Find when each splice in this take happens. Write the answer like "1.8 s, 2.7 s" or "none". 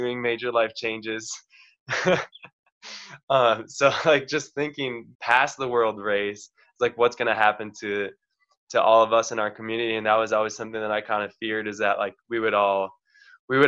5.1 s